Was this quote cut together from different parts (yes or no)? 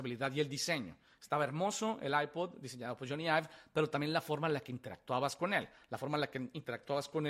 no